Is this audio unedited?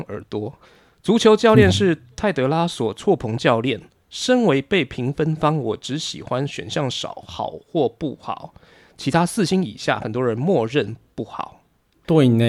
yes; 0 cuts

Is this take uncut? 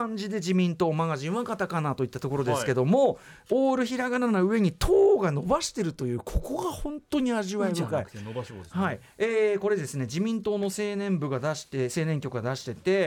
yes; 0 cuts

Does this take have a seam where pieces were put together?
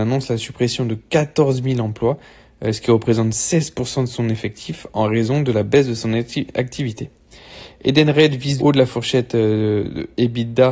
yes; 1 cut; at 8.6 s

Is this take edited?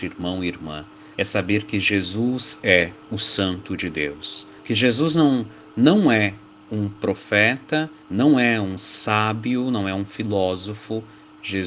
yes; 3 cuts; at 1.1 s, 4.6 s, 8.0 s

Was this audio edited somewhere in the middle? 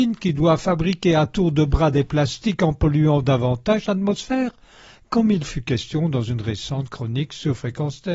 no; 0 cuts

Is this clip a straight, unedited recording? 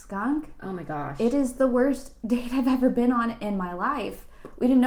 yes; 0 cuts

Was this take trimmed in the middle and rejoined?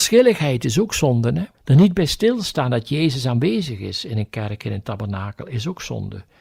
yes; 1 cut; at 1.5 s

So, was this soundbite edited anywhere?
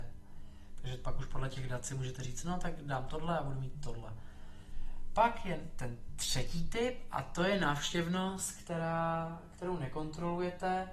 no; 0 cuts

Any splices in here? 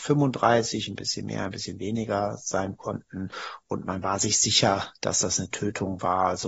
no; 0 cuts

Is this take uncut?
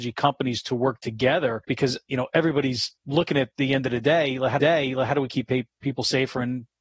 no; 3 cuts; at 1.6 s, 3.0 s, 4.6 s

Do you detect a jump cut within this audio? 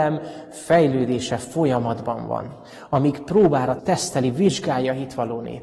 yes; 1 cut; at 3.8 s

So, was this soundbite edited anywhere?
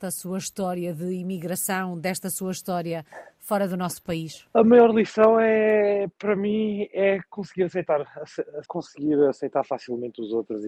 yes; 1 cut; at 8.7 s

